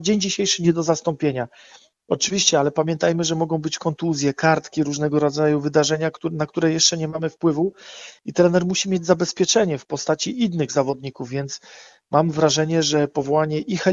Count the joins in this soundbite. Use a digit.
0